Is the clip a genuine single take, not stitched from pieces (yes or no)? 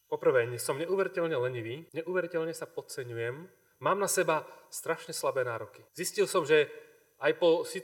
no